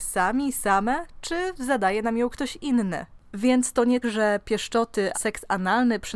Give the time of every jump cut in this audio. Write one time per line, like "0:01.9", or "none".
0:04.0
0:05.1

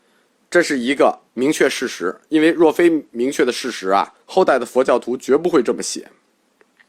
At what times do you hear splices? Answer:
0:01.3
0:04.2

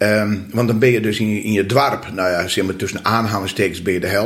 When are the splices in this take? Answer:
none

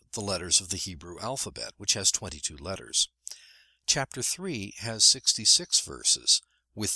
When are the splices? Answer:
none

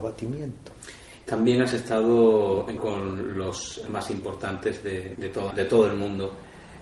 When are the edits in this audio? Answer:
0:02.8
0:03.9
0:05.1
0:05.5

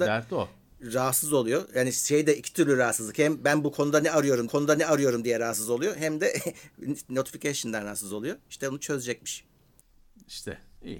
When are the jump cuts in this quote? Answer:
0:04.5
0:09.8

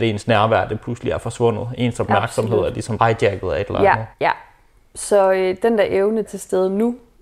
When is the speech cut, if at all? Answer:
0:03.0
0:04.1
0:06.2

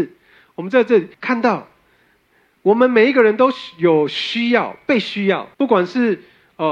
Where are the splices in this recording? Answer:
0:01.1
0:05.5

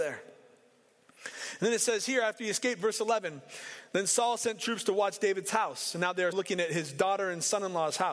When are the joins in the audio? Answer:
0:06.3

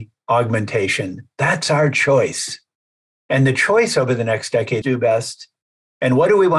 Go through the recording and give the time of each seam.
0:04.8

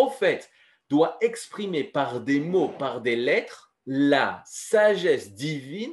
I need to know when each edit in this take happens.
0:03.8

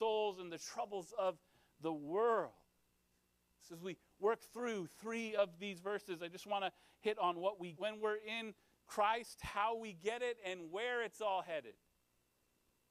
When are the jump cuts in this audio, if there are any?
0:07.7

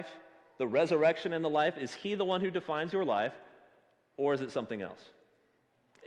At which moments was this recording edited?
none

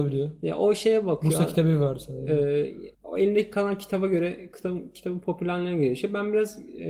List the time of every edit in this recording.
0:02.9

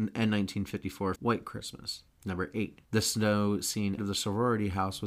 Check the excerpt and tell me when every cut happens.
0:01.2
0:02.1
0:02.9
0:04.0

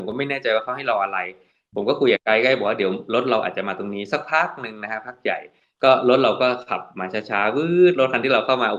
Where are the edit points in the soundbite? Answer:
none

